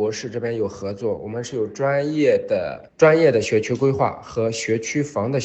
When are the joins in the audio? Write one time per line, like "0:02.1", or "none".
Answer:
0:02.9